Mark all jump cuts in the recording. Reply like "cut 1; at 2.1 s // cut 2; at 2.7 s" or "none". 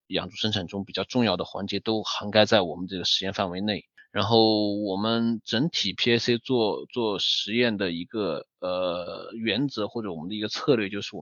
none